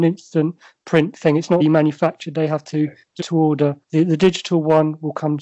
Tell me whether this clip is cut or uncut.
cut